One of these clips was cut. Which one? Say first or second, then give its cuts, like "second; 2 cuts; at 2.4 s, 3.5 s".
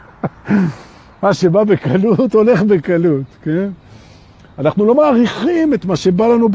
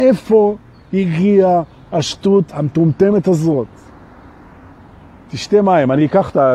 second; 1 cut; at 2.5 s